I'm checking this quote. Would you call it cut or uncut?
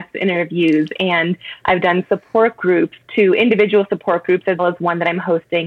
cut